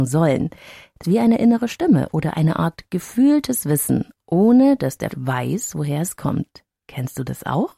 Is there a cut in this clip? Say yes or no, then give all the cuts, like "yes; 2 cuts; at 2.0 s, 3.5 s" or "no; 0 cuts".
yes; 2 cuts; at 1.0 s, 5.1 s